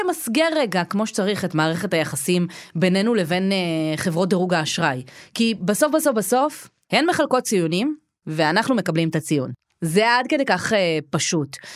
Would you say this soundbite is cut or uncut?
uncut